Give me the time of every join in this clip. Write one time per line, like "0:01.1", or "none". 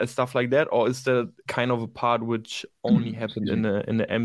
0:01.5